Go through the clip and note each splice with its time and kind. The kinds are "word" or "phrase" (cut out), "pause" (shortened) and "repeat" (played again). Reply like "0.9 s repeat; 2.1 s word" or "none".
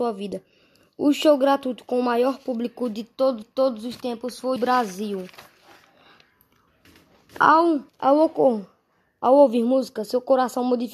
3.4 s repeat; 4.6 s word; 7.9 s pause